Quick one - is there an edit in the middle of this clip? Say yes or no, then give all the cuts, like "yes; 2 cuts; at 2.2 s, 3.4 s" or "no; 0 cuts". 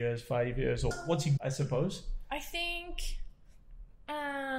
yes; 2 cuts; at 0.9 s, 1.4 s